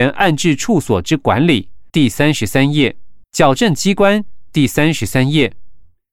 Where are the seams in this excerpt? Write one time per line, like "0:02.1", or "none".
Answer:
0:01.9
0:03.2